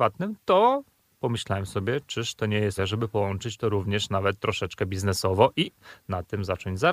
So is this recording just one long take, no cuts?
no; 1 cut; at 2.8 s

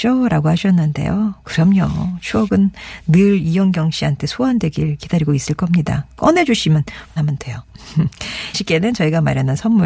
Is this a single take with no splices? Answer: no; 2 cuts; at 7.2 s, 8.5 s

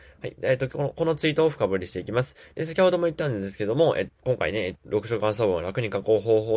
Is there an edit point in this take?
yes; 2 cuts; at 4.1 s, 4.7 s

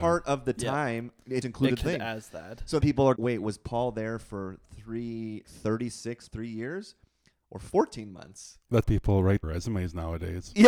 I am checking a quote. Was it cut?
yes; 8 cuts; at 1.4 s, 1.8 s, 2.8 s, 3.2 s, 5.4 s, 6.3 s, 8.8 s, 9.4 s

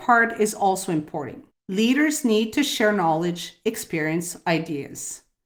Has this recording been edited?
yes; 1 cut; at 1.5 s

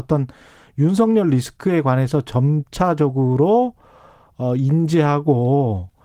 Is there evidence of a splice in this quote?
no; 0 cuts

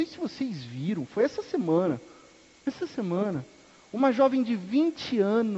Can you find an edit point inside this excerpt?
no; 0 cuts

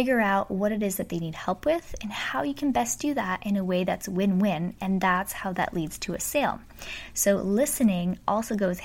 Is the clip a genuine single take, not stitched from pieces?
yes; 0 cuts

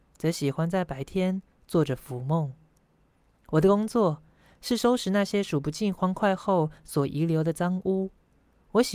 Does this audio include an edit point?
no; 0 cuts

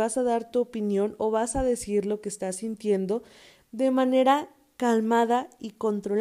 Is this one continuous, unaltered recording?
yes; 0 cuts

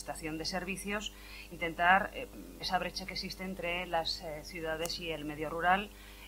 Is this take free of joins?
no; 2 cuts; at 1.5 s, 2.6 s

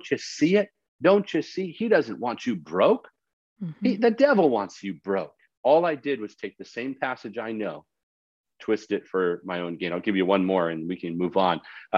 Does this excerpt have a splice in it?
no; 0 cuts

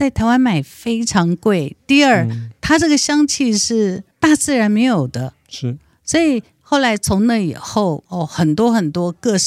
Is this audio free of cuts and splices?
no; 2 cuts; at 4.1 s, 8.1 s

